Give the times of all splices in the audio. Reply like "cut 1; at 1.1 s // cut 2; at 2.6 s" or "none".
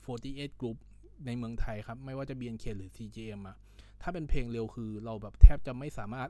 none